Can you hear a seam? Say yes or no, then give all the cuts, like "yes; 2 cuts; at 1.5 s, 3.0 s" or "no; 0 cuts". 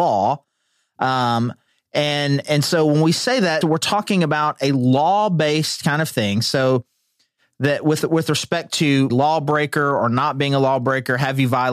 yes; 2 cuts; at 3.6 s, 9.1 s